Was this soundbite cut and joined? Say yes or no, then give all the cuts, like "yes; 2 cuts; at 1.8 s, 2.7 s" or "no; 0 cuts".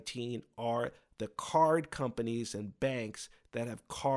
no; 0 cuts